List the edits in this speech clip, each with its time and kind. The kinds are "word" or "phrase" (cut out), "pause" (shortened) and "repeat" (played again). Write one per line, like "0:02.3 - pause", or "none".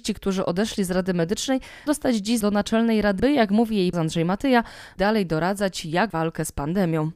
0:01.9 - word
0:02.4 - word
0:03.2 - word
0:03.9 - word
0:05.0 - word
0:06.1 - word